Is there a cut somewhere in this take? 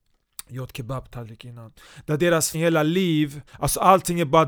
yes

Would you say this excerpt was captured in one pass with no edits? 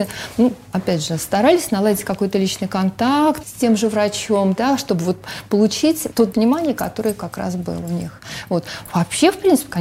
no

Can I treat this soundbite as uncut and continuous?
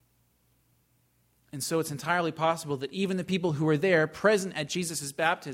yes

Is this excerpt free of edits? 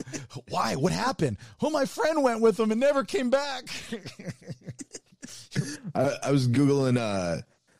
yes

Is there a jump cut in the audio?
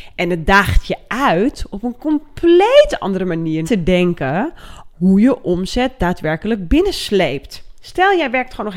yes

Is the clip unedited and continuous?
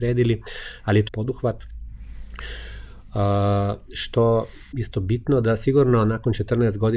no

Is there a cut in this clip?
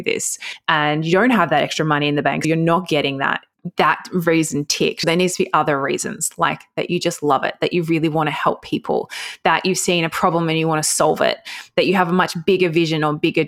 no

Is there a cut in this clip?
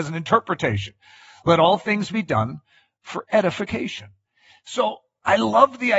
no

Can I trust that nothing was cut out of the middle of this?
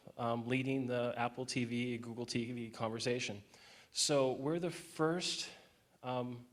yes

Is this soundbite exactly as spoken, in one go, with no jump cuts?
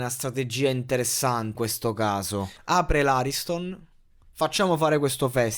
no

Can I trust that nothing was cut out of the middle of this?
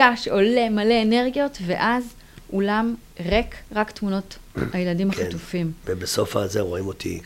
yes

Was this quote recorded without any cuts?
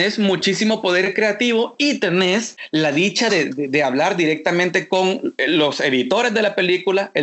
yes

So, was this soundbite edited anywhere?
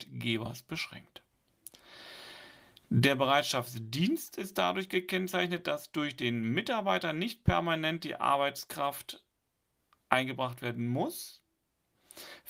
no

